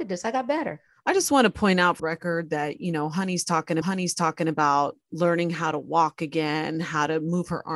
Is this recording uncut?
no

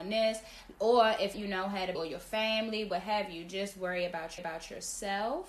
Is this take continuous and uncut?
no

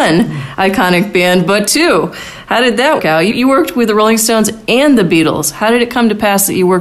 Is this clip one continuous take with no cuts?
no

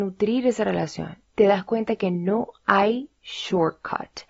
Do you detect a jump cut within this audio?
yes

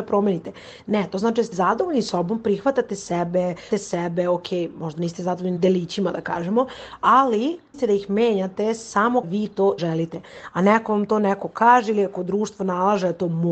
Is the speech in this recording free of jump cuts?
no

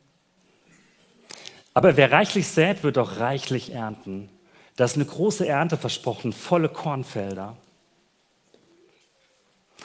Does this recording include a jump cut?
no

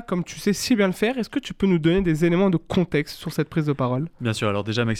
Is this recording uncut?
yes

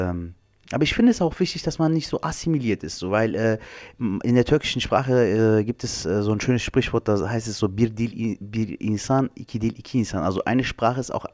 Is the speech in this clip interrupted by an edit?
no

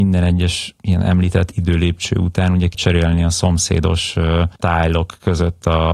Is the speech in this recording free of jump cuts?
no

